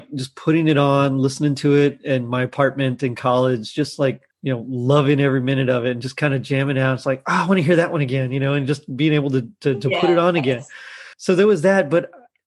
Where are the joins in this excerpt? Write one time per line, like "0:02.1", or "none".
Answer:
0:04.3
0:11.1